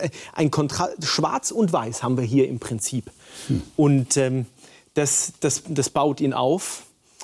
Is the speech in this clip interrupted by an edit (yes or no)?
no